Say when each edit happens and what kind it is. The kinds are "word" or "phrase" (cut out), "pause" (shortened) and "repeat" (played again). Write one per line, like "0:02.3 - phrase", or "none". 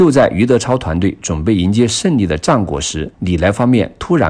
0:03.1 - pause